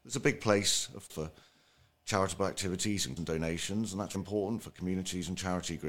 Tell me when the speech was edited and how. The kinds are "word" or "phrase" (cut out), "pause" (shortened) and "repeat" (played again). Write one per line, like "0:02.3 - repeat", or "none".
0:01.1 - word
0:03.2 - word
0:04.1 - word